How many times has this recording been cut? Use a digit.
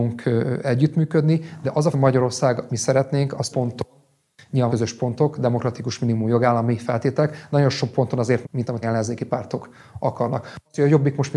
6